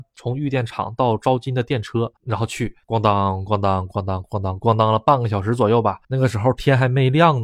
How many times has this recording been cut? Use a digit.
3